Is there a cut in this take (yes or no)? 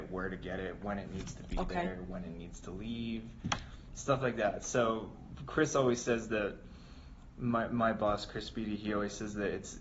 no